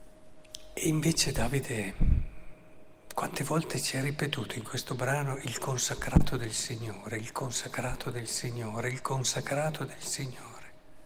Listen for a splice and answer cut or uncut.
uncut